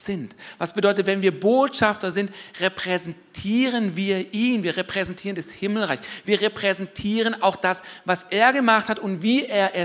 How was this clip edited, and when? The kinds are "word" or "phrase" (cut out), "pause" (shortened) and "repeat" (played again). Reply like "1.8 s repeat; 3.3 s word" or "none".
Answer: none